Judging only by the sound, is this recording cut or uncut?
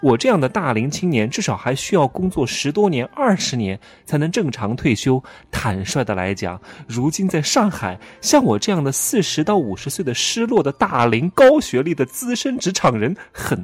uncut